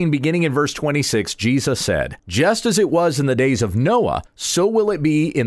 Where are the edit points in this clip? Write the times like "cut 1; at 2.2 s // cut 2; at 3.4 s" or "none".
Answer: cut 1; at 2.2 s // cut 2; at 4.3 s

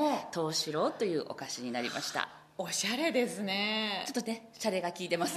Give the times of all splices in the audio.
none

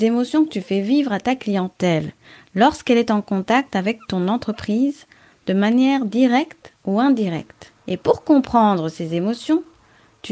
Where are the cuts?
cut 1; at 7.8 s

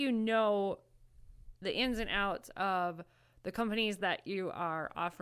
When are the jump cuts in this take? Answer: none

